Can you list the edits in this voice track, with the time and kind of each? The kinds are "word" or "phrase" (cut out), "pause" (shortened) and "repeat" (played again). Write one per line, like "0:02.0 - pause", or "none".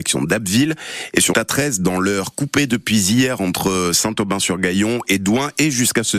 0:01.3 - word